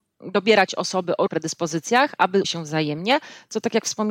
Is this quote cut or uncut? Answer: cut